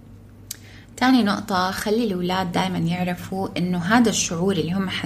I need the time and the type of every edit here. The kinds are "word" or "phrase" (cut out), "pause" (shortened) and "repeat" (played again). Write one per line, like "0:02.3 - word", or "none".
none